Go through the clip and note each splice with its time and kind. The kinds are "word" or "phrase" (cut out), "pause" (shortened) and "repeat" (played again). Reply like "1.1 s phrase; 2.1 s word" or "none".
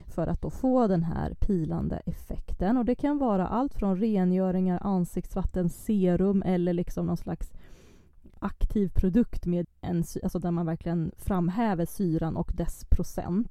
9.6 s word